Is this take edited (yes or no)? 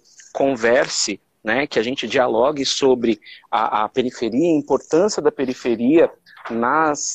no